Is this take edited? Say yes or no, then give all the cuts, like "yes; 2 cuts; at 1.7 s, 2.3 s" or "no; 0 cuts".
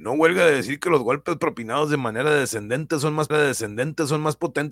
yes; 1 cut; at 3.3 s